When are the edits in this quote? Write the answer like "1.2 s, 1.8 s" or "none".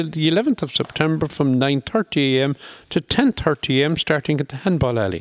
none